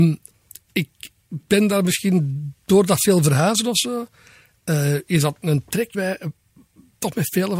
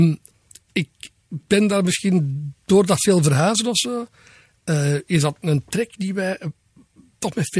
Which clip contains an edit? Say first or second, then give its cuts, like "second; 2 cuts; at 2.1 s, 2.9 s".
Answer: first; 1 cut; at 5.9 s